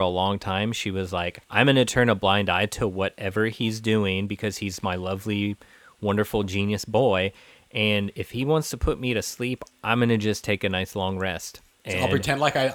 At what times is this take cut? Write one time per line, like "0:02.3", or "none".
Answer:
0:01.4